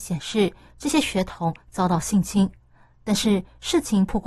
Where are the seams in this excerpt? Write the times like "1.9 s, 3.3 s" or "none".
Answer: none